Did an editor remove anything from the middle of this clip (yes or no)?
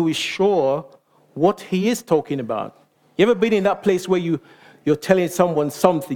no